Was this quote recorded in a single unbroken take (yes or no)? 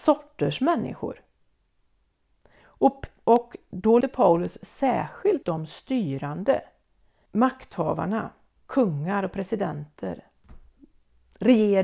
no